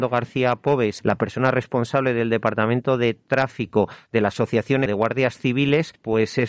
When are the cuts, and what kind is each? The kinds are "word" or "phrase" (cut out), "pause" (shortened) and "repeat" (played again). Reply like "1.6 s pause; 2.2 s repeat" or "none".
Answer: 4.9 s word